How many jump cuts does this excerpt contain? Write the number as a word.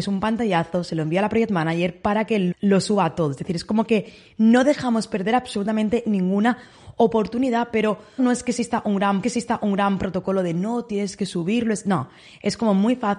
three